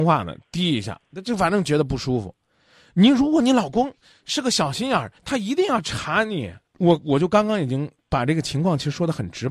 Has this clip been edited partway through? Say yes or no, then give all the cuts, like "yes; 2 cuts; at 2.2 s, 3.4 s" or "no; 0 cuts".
yes; 3 cuts; at 5.2 s, 6.7 s, 8.0 s